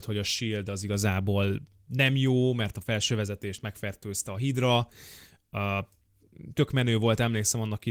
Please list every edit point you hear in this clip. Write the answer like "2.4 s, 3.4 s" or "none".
6.5 s